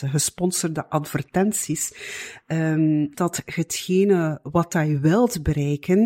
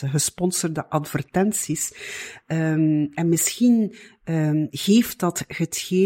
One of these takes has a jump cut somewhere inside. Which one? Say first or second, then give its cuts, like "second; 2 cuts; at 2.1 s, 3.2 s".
first; 1 cut; at 3.1 s